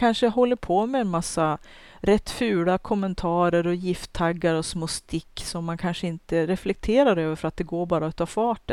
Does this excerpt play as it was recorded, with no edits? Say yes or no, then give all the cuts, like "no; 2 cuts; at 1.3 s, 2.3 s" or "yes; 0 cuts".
yes; 0 cuts